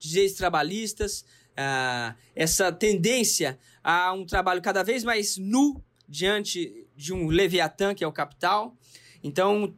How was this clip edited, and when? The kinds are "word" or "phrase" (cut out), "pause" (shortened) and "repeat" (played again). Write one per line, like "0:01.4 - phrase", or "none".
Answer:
none